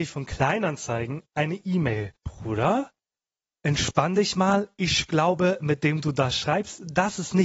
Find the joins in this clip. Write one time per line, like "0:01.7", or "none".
0:02.2